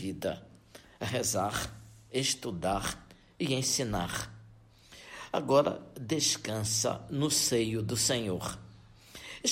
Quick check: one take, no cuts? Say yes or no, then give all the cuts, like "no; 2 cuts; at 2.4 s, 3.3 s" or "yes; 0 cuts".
yes; 0 cuts